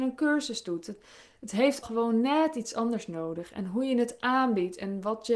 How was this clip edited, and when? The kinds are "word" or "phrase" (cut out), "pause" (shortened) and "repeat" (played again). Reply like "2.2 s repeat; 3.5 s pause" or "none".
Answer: 1.8 s word